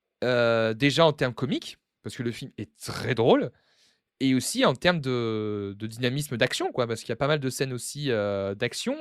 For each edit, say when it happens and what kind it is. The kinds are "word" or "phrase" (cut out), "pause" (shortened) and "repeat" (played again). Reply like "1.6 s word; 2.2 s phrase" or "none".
none